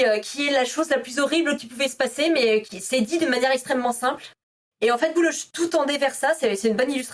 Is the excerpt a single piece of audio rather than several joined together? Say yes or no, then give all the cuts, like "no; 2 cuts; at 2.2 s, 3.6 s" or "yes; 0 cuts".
no; 2 cuts; at 2.7 s, 5.2 s